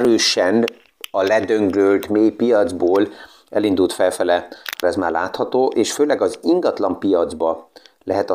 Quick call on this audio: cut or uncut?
cut